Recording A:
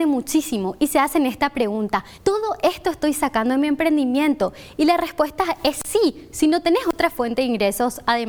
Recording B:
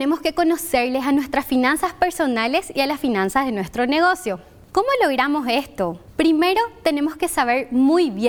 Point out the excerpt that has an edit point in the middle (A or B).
A